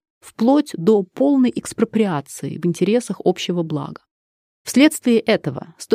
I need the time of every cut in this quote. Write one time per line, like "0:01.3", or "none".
none